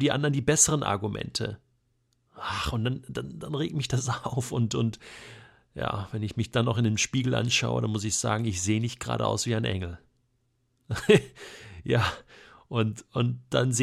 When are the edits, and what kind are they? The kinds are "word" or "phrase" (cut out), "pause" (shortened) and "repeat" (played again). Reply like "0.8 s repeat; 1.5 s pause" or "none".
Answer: none